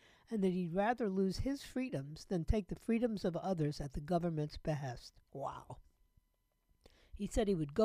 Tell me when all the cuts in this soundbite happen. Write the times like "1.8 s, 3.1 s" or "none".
5.3 s